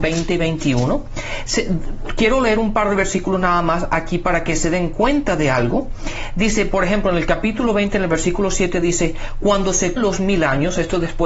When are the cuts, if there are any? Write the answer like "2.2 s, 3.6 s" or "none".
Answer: 10.0 s

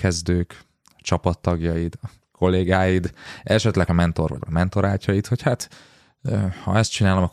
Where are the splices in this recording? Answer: 3.9 s, 4.4 s

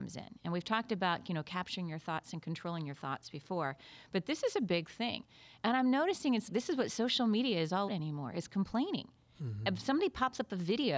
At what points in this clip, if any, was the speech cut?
6.5 s, 7.9 s

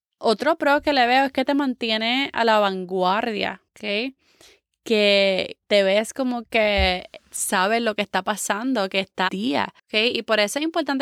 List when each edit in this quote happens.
3.7 s, 5.6 s, 9.3 s, 9.8 s

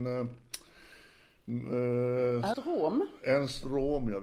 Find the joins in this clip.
2.5 s

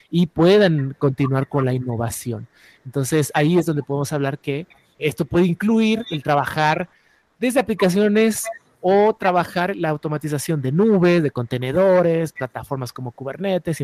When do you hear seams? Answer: 5.0 s

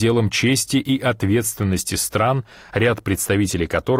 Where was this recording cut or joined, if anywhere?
none

